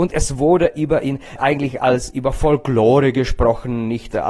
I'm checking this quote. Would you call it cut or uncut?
uncut